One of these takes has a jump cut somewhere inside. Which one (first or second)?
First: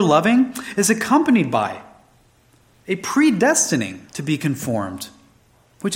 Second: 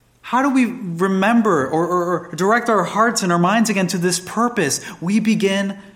first